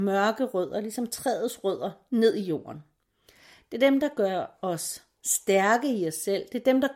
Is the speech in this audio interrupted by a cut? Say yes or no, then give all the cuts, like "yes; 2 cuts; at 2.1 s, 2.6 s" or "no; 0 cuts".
no; 0 cuts